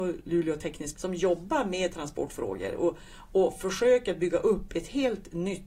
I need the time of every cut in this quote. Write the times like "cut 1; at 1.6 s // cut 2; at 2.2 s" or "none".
cut 1; at 0.9 s